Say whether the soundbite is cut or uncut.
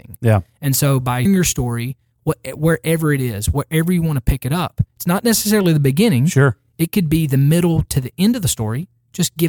cut